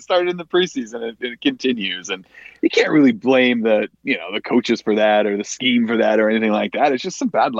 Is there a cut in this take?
yes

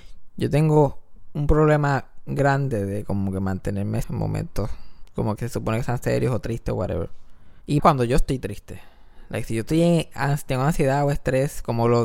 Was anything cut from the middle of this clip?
yes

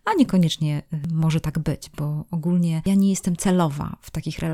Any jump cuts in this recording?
no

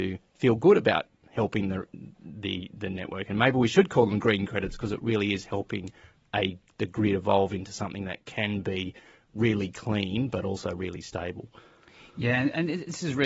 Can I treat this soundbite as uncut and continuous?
yes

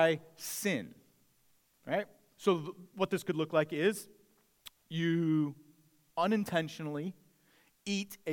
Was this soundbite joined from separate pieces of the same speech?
no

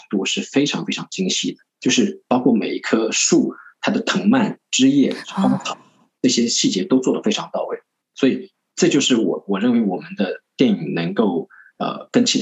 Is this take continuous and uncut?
no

